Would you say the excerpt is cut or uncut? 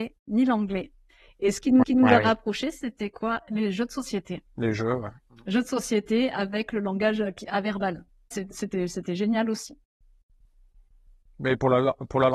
cut